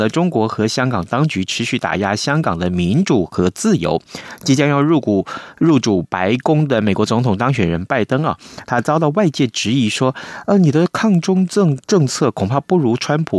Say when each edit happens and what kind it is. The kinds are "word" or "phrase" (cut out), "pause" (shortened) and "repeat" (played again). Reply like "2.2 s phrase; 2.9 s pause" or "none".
11.8 s pause